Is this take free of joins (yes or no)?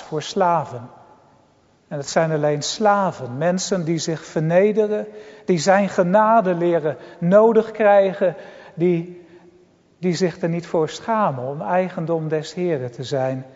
yes